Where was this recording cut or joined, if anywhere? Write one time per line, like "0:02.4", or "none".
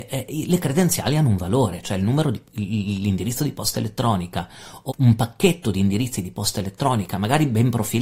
0:04.9